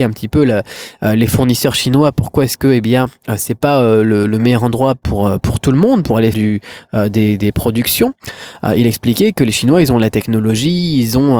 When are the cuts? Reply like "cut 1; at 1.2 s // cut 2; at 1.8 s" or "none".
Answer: cut 1; at 6.3 s